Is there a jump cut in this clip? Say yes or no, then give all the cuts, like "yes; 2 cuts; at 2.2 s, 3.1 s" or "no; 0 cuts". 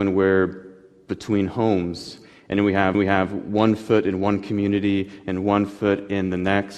yes; 1 cut; at 2.9 s